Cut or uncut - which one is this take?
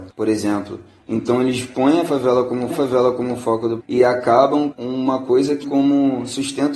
cut